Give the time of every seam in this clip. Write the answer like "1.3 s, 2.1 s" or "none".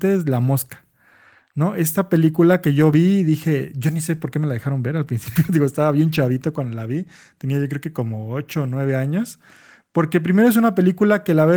none